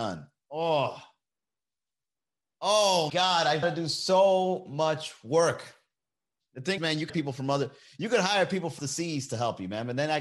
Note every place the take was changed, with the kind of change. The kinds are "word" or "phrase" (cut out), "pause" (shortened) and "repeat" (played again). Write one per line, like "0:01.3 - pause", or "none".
0:03.1 - word
0:03.6 - word
0:06.8 - word
0:07.1 - word
0:08.8 - word